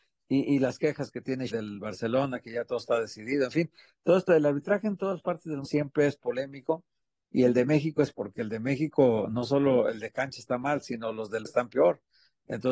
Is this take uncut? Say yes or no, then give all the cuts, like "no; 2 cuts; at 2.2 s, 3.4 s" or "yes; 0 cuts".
no; 4 cuts; at 1.5 s, 5.6 s, 8.1 s, 11.5 s